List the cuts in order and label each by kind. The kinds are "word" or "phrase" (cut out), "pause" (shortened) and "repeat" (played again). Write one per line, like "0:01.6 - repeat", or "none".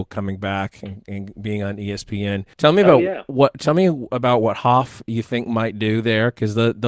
0:02.5 - pause